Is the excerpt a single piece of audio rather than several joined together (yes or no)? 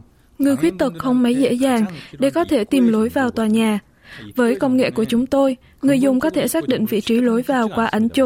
yes